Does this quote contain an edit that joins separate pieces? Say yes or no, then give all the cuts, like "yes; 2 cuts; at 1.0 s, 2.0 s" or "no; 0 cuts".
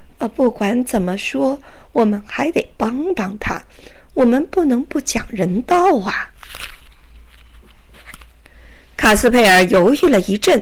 no; 0 cuts